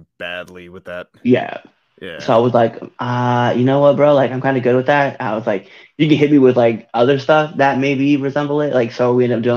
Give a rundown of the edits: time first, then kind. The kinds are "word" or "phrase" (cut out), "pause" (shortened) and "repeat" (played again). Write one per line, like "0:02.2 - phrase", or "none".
none